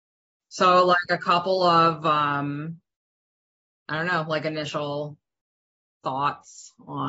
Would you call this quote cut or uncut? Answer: uncut